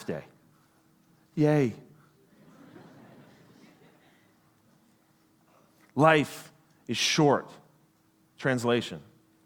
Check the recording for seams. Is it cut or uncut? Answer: uncut